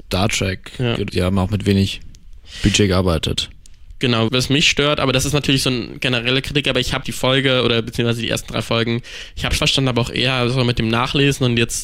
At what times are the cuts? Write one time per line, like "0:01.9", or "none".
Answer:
0:01.1
0:04.3
0:07.0
0:09.6